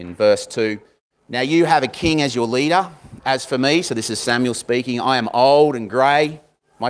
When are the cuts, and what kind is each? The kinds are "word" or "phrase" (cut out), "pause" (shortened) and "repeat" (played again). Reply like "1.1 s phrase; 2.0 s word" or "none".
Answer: none